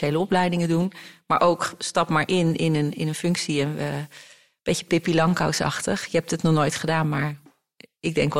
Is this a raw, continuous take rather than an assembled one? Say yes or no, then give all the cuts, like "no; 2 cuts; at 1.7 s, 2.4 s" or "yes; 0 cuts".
yes; 0 cuts